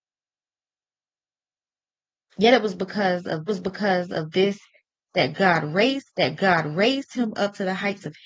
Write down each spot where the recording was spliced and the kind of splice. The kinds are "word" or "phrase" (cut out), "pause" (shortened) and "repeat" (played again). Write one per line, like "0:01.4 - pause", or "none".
0:03.5 - repeat
0:06.1 - repeat